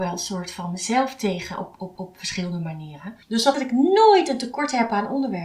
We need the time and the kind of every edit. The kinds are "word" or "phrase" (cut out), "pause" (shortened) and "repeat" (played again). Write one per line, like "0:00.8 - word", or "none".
0:02.0 - repeat
0:03.5 - word